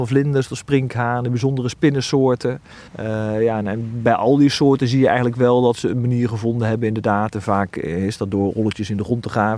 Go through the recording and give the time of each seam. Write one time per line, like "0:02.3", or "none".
0:02.9